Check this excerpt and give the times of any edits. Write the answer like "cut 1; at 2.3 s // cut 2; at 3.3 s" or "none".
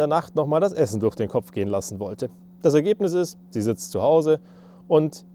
none